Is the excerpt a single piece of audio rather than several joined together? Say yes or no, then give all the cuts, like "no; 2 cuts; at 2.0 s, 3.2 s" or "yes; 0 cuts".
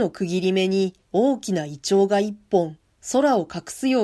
no; 1 cut; at 1.0 s